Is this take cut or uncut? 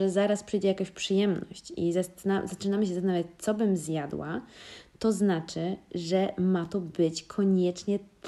uncut